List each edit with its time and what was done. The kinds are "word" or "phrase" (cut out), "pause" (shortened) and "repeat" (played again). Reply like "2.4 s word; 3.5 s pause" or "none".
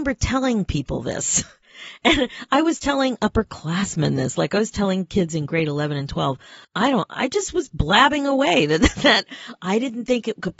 6.6 s pause